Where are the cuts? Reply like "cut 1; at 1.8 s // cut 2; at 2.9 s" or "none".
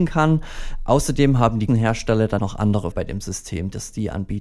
cut 1; at 1.7 s // cut 2; at 2.4 s // cut 3; at 2.9 s